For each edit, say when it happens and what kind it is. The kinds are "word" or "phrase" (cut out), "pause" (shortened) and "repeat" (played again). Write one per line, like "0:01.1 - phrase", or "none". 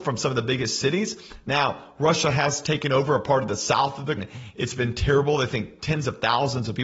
0:04.2 - word